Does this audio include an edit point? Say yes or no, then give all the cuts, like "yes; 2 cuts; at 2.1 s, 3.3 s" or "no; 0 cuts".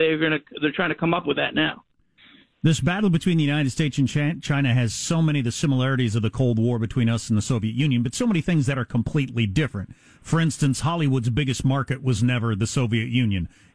no; 0 cuts